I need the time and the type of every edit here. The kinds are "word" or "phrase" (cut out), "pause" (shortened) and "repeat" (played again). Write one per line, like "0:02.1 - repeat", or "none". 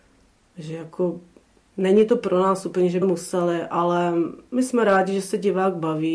0:03.0 - word